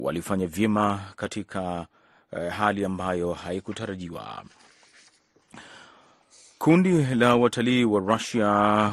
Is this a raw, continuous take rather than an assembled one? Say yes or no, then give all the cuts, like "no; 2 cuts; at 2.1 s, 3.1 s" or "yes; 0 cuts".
yes; 0 cuts